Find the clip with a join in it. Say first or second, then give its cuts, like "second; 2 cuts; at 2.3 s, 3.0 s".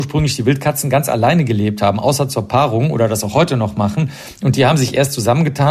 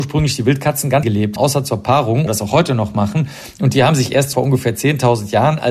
second; 4 cuts; at 1.0 s, 1.4 s, 2.3 s, 4.3 s